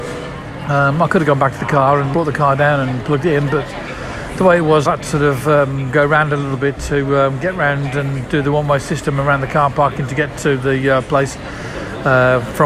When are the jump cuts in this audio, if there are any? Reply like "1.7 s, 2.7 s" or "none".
2.1 s, 4.8 s